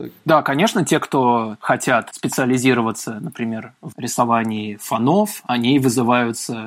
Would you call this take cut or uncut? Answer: uncut